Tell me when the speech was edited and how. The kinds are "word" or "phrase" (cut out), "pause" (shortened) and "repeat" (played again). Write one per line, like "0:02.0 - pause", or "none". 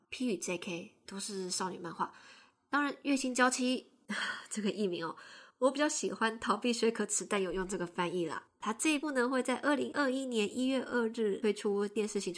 none